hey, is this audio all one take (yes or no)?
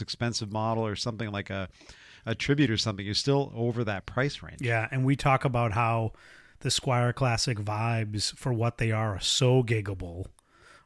yes